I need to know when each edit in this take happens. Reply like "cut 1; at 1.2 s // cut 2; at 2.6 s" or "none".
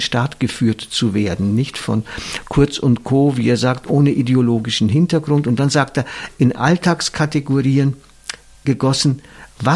none